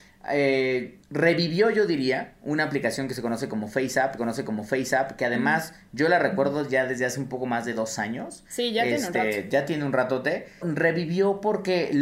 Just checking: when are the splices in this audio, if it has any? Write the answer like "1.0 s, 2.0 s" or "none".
1.0 s, 4.2 s, 10.6 s